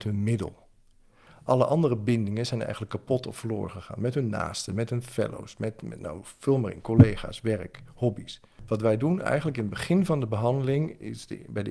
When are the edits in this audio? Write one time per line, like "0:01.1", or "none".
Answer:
none